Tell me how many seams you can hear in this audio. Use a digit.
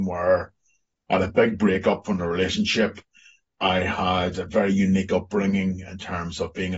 0